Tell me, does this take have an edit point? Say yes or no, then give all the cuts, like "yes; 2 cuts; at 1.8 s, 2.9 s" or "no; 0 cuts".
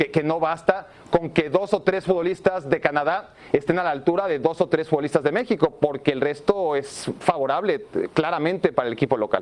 no; 0 cuts